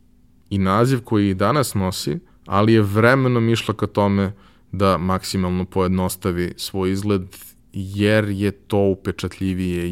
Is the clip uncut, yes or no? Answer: no